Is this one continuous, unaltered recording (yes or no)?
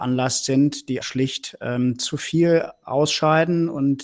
no